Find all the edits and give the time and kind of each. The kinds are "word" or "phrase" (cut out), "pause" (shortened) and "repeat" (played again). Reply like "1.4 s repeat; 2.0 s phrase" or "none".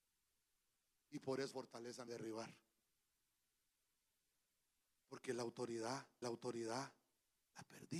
1.5 s word; 2.1 s phrase; 6.2 s repeat